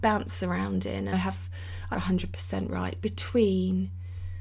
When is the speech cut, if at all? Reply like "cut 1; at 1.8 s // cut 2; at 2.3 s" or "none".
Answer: cut 1; at 1.1 s // cut 2; at 1.9 s